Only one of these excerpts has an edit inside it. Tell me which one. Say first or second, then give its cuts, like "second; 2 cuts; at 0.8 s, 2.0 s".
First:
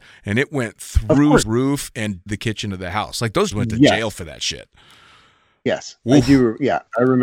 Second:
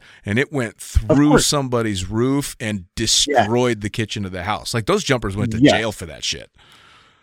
first; 3 cuts; at 1.4 s, 2.3 s, 3.5 s